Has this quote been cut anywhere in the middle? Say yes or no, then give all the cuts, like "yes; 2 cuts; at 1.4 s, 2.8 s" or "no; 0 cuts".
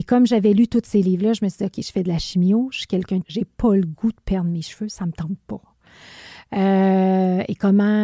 yes; 1 cut; at 3.2 s